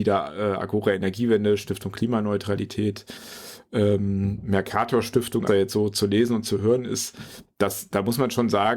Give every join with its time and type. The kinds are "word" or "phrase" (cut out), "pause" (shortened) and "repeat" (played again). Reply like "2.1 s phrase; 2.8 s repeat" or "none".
5.5 s phrase